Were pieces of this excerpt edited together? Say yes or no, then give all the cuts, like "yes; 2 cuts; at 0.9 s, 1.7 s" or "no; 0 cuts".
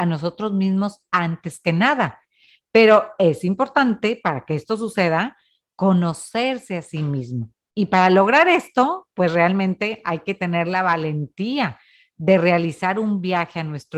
no; 0 cuts